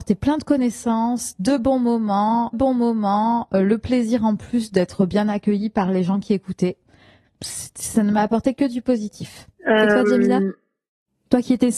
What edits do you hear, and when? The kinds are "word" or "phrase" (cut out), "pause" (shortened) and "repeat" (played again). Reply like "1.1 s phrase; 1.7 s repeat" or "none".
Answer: 2.5 s repeat